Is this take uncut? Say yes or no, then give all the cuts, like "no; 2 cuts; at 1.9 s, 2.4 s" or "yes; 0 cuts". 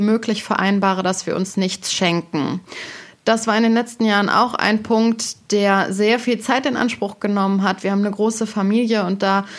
yes; 0 cuts